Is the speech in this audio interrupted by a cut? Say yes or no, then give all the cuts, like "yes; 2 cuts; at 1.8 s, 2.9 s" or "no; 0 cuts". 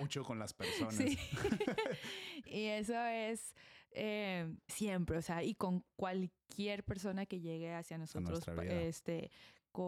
yes; 2 cuts; at 2.4 s, 4.7 s